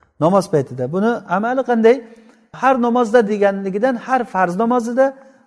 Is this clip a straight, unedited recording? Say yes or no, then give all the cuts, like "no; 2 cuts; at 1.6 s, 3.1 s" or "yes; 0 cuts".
yes; 0 cuts